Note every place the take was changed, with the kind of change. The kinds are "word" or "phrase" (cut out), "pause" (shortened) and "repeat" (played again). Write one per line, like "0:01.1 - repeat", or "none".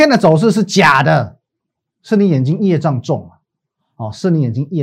none